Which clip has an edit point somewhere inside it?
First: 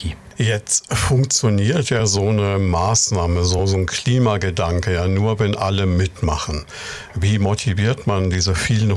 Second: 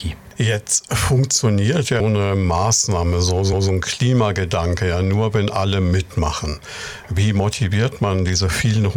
second; 2 cuts; at 2.0 s, 3.5 s

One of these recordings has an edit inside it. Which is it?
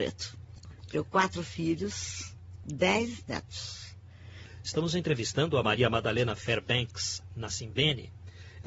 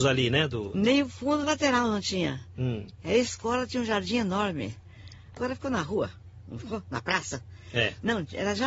second; 2 cuts; at 1.4 s, 5.4 s

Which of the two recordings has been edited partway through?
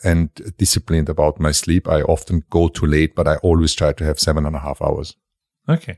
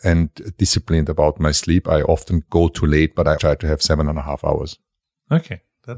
second; 1 cut; at 3.4 s

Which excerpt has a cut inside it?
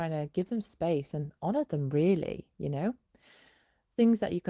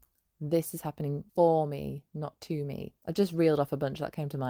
second; 2 cuts; at 1.3 s, 3.0 s

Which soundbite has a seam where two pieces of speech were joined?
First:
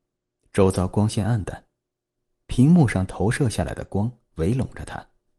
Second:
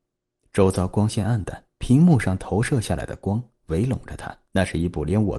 second; 2 cuts; at 1.7 s, 4.4 s

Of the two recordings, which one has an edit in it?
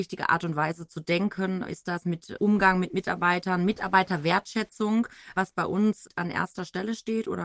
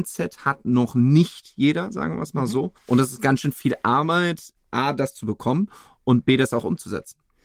second; 1 cut; at 2.8 s

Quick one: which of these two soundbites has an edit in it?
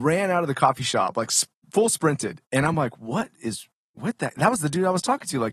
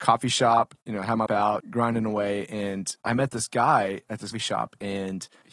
second; 3 cuts; at 1.3 s, 1.6 s, 4.3 s

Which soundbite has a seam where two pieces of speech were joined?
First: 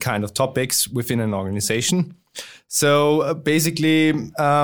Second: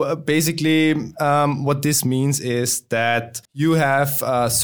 second; 1 cut; at 3.4 s

